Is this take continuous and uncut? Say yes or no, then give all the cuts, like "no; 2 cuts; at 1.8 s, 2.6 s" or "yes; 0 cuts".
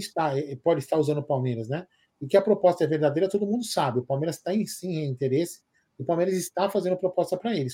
yes; 0 cuts